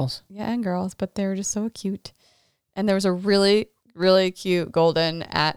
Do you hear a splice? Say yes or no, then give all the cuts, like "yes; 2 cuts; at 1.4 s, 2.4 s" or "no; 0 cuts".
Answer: no; 0 cuts